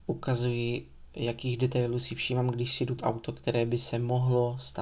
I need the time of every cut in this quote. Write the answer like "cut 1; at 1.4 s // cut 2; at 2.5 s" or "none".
cut 1; at 3.0 s